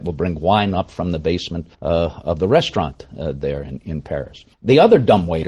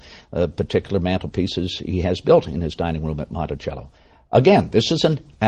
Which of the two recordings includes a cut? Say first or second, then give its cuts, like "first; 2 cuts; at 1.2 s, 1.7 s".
first; 2 cuts; at 1.7 s, 4.5 s